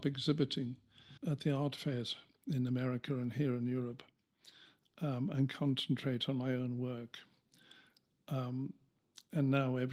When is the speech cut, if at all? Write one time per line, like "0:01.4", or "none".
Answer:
0:01.2